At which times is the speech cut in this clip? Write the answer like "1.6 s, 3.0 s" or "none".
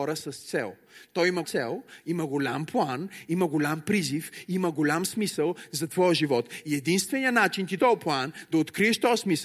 1.4 s, 7.8 s